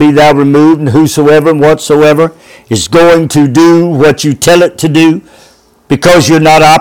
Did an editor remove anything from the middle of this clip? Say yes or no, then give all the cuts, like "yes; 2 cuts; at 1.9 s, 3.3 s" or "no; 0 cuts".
no; 0 cuts